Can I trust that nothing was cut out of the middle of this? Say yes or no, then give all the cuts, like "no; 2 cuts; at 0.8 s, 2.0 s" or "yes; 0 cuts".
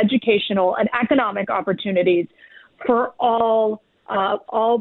yes; 0 cuts